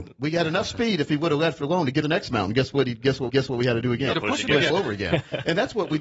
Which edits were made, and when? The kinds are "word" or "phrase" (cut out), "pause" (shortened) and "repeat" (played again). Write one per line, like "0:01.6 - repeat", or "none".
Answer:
0:02.0 - word
0:03.3 - repeat
0:04.1 - phrase
0:04.7 - word